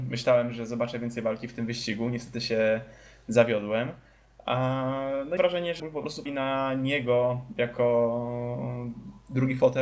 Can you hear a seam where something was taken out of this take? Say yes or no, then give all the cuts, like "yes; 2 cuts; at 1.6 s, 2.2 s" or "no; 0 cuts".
yes; 3 cuts; at 5.4 s, 5.8 s, 6.3 s